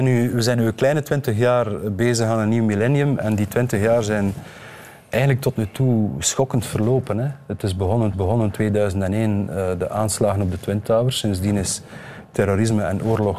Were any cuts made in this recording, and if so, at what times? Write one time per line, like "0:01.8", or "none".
0:08.1